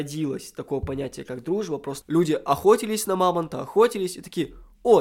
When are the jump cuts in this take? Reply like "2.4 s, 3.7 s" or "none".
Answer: 2.0 s